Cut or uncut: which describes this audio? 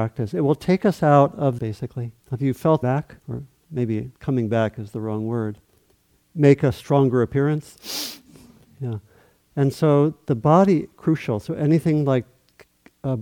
cut